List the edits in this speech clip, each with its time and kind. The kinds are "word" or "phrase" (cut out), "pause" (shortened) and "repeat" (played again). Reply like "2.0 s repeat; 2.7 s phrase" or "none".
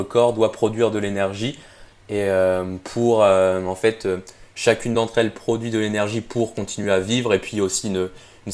none